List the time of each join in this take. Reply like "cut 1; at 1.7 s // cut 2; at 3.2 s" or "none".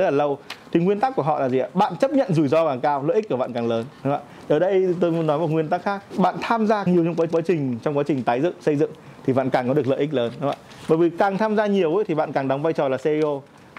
cut 1; at 5.0 s // cut 2; at 6.1 s // cut 3; at 6.9 s // cut 4; at 7.3 s

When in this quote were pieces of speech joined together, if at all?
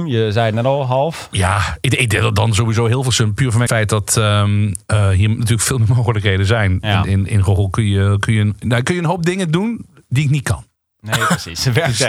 cut 1; at 3.7 s // cut 2; at 10.8 s

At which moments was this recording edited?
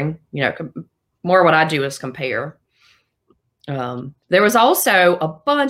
cut 1; at 4.2 s

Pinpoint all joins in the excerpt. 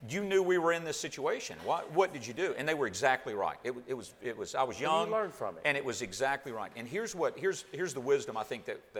none

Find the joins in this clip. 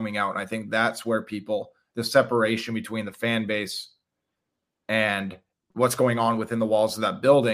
none

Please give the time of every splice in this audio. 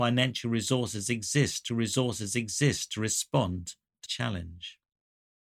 cut 1; at 1.7 s // cut 2; at 4.1 s

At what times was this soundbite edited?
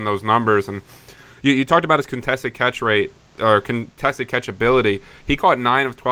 none

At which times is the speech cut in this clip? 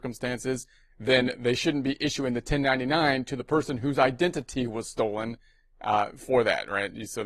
none

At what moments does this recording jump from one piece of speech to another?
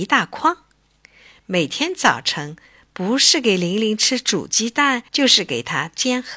cut 1; at 5.1 s

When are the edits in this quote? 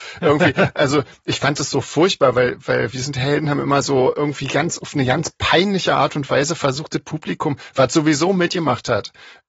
none

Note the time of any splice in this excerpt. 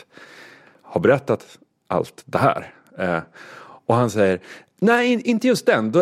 none

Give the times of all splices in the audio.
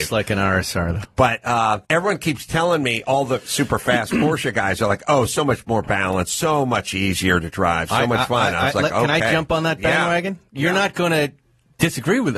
cut 1; at 1.8 s

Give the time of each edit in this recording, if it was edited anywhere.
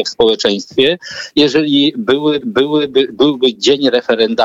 cut 1; at 2.4 s

